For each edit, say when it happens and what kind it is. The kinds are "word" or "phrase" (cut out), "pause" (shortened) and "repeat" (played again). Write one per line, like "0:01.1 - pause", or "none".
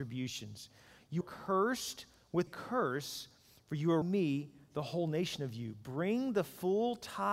0:01.2 - word
0:02.5 - word
0:04.0 - word